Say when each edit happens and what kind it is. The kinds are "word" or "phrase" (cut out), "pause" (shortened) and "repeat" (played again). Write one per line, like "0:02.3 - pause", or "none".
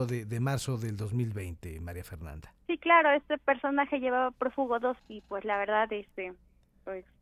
0:02.6 - pause
0:05.0 - word